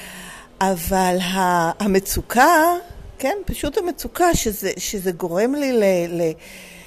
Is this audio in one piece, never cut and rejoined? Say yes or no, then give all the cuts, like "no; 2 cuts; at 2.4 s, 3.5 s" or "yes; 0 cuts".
yes; 0 cuts